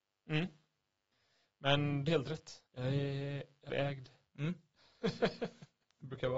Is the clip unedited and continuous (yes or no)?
no